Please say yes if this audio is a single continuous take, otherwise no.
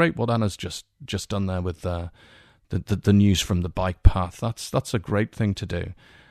yes